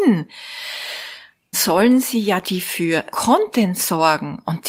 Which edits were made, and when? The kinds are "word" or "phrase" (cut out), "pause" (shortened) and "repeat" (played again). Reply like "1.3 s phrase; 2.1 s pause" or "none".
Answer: 1.5 s word; 2.4 s word; 3.1 s word